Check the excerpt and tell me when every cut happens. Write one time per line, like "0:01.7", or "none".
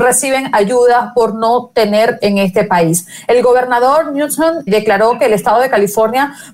0:02.2
0:04.7

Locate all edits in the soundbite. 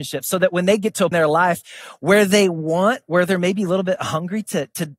0:01.1

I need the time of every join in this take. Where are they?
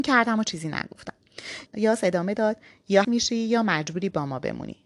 0:01.7
0:03.0

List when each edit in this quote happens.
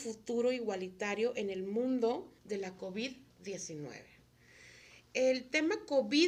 0:02.4

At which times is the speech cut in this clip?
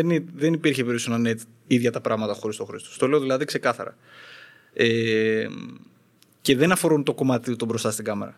none

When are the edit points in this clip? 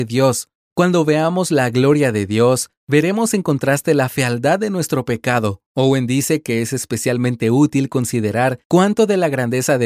0:05.7

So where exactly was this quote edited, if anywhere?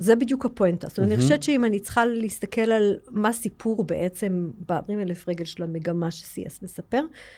0:04.9

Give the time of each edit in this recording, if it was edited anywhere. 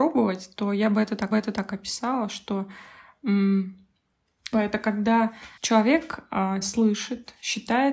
0:01.3
0:04.5
0:05.6
0:06.6

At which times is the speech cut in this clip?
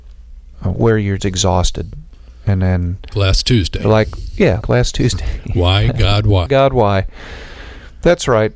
0:01.2
0:03.1
0:04.6
0:06.5

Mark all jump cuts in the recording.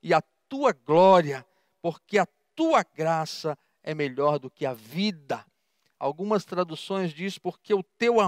none

